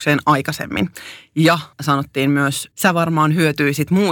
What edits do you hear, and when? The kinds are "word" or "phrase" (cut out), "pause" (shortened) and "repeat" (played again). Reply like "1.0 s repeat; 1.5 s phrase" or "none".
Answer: 1.7 s word; 2.7 s word